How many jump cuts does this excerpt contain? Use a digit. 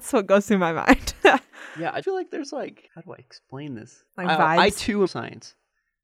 4